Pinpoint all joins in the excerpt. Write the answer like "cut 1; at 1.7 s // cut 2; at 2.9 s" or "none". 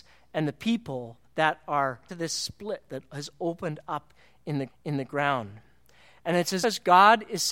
cut 1; at 1.2 s // cut 2; at 2.1 s // cut 3; at 4.7 s // cut 4; at 6.6 s